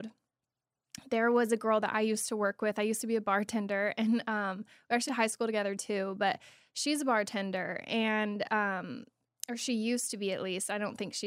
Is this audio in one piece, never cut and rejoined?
no; 1 cut; at 5.1 s

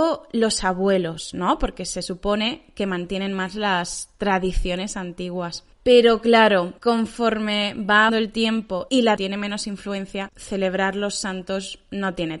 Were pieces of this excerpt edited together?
yes; 5 cuts; at 5.7 s, 6.8 s, 8.1 s, 9.2 s, 10.3 s

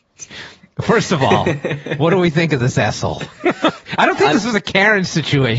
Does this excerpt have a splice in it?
no; 0 cuts

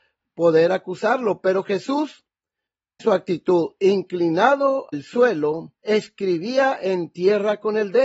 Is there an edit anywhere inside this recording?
yes; 3 cuts; at 3.0 s, 4.9 s, 5.8 s

